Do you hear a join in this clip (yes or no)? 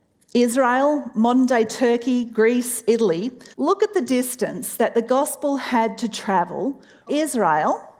yes